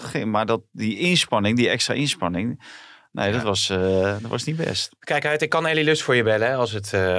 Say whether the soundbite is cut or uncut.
uncut